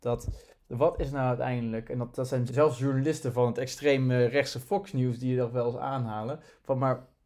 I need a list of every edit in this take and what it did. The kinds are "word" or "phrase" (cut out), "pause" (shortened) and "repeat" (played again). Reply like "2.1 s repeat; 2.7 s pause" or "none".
2.5 s word